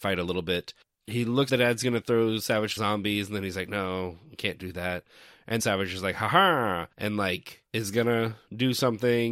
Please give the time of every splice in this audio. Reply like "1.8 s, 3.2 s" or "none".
1.5 s, 2.8 s, 5.6 s, 6.9 s, 7.7 s